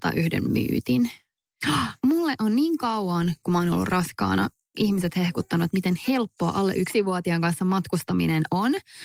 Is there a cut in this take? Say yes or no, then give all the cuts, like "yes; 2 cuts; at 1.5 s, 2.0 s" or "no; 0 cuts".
no; 0 cuts